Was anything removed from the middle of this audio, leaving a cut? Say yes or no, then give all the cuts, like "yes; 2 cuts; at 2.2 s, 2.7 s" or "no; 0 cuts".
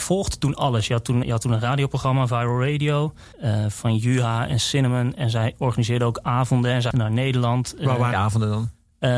yes; 4 cuts; at 1.2 s, 3.3 s, 6.9 s, 8.1 s